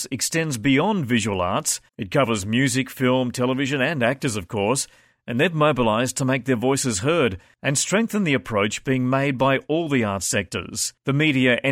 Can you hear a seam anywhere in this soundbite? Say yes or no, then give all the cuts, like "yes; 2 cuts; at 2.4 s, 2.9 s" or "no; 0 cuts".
yes; 1 cut; at 1.9 s